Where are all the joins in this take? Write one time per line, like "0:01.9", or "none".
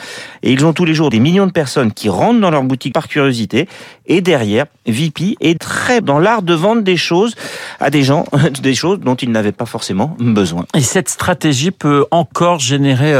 0:01.1
0:02.9
0:05.6
0:06.0